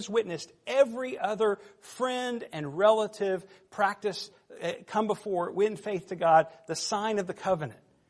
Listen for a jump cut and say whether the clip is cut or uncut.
uncut